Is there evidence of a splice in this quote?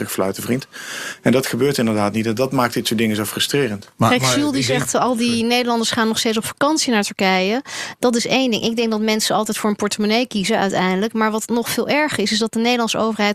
no; 0 cuts

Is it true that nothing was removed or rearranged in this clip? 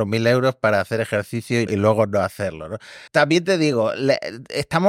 no; 2 cuts; at 1.7 s, 3.1 s

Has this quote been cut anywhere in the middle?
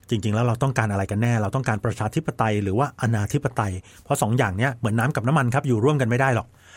no; 0 cuts

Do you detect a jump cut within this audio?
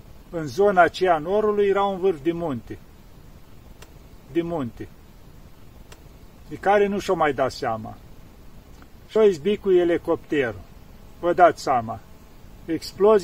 yes; 3 cuts; at 4.3 s, 9.2 s, 11.2 s

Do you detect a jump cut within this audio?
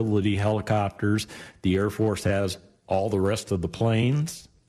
no; 0 cuts

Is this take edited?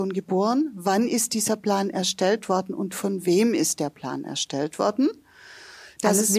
no; 0 cuts

